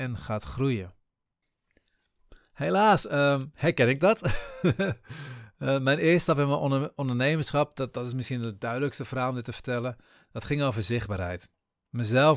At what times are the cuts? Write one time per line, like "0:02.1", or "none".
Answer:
none